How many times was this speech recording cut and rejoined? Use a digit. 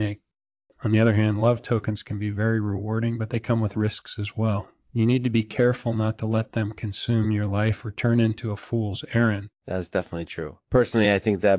1